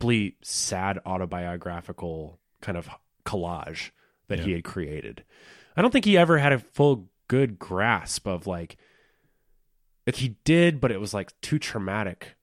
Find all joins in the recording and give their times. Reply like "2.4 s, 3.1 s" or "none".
10.1 s